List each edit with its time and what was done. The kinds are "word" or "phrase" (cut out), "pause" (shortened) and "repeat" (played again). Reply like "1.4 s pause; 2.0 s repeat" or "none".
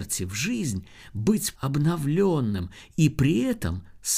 1.6 s word